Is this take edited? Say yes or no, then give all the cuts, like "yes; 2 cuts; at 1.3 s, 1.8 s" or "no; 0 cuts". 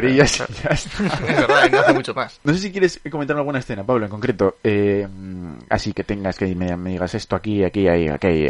yes; 1 cut; at 5.9 s